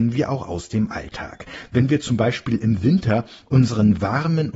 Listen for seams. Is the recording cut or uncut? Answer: uncut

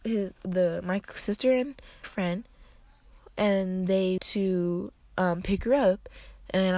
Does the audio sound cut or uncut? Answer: cut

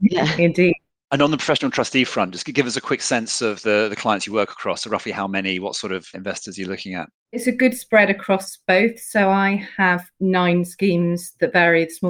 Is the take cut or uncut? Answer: uncut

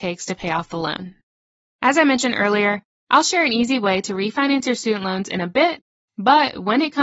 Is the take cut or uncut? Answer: uncut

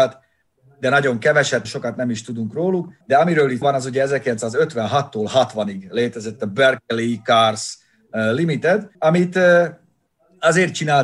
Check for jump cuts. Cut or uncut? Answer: cut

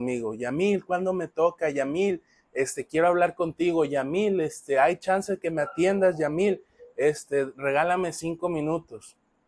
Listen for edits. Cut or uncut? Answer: uncut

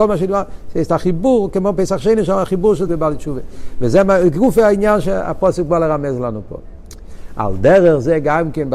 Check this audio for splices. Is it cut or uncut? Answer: cut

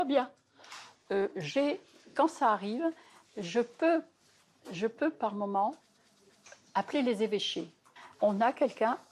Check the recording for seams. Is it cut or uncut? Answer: uncut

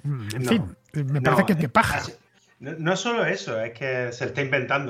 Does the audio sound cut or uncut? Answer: cut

